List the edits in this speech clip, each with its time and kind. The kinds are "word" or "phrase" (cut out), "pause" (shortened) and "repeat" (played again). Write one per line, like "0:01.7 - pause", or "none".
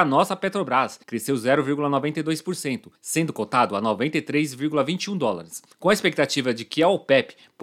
0:01.0 - pause
0:03.0 - pause
0:05.7 - pause